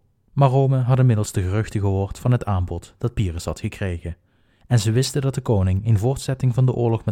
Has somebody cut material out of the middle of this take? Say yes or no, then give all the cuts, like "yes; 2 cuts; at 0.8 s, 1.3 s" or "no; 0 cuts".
no; 0 cuts